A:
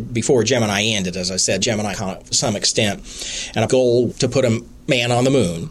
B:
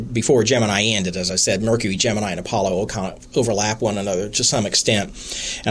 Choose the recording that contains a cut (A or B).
A